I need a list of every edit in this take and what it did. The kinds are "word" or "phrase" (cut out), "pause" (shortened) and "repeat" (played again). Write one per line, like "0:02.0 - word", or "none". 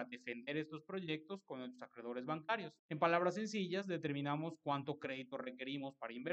0:02.8 - pause